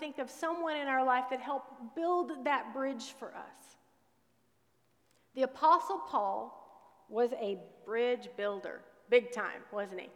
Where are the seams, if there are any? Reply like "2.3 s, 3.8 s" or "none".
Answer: none